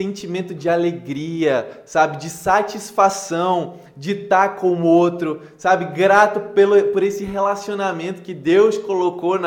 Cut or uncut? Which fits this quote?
uncut